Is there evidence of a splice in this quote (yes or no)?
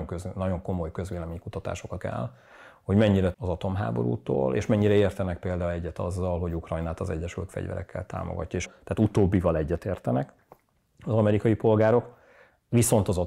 yes